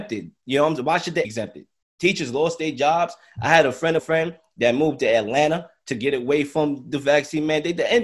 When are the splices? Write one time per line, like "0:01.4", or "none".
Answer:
0:01.2
0:04.0